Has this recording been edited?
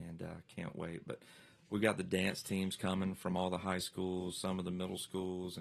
no; 0 cuts

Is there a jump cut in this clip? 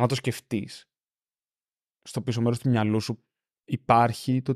no; 0 cuts

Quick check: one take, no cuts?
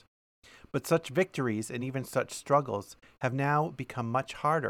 yes; 0 cuts

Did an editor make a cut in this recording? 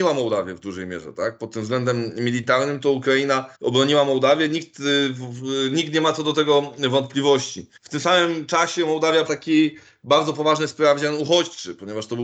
yes; 3 cuts; at 3.5 s, 7.8 s, 9.3 s

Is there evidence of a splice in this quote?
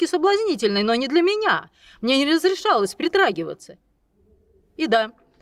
no; 0 cuts

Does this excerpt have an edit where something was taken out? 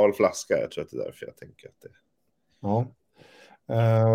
no; 0 cuts

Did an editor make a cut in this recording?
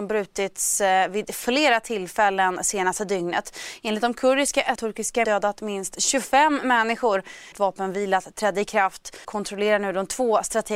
yes; 4 cuts; at 4.8 s, 5.2 s, 7.5 s, 9.2 s

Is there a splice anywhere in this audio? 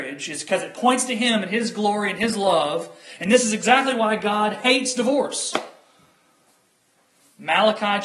no; 0 cuts

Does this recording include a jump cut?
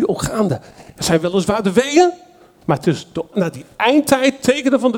yes; 1 cut; at 3.3 s

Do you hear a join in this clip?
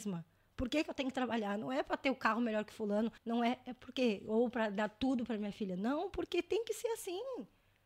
yes; 1 cut; at 3.2 s

